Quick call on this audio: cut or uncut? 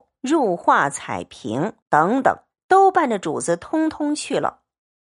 cut